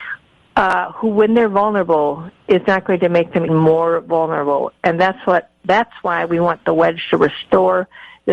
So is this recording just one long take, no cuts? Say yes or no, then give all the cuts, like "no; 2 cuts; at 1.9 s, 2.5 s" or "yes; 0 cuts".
no; 1 cut; at 3.5 s